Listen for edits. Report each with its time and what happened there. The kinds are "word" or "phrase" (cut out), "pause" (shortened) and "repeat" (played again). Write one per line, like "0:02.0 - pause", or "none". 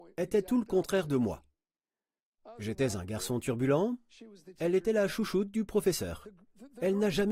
none